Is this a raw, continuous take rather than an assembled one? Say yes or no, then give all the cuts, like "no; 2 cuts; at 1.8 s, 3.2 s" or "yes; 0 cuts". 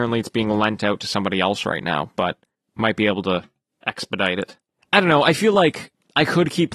yes; 0 cuts